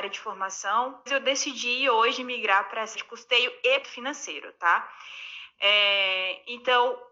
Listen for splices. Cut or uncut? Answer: cut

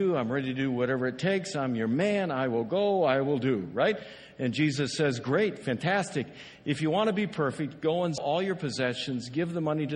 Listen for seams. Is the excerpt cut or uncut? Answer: cut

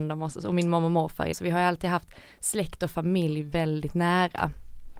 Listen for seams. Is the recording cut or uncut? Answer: cut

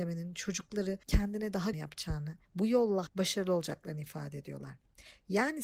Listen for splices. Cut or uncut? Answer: cut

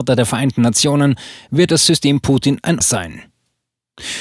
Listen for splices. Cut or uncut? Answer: cut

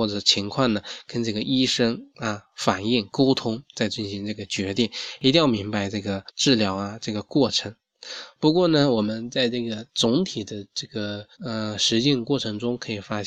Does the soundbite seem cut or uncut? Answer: cut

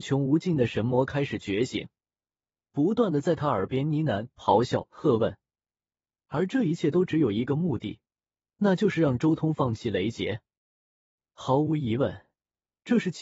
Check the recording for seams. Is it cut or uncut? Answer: uncut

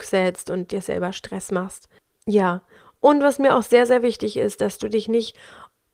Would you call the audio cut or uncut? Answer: uncut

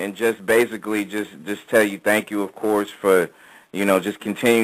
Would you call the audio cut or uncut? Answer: uncut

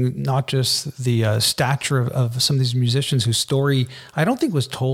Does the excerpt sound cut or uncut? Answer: uncut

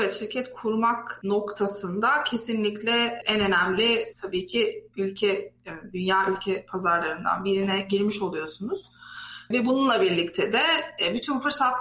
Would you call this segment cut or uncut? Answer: uncut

